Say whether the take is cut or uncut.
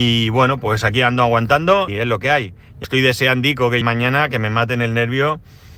cut